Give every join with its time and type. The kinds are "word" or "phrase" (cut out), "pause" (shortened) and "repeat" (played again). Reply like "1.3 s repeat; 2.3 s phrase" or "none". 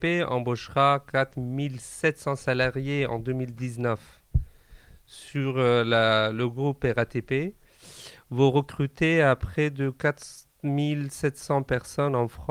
none